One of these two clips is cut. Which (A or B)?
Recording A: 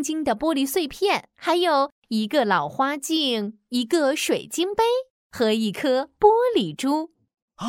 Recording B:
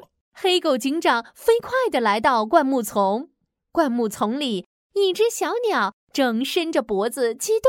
A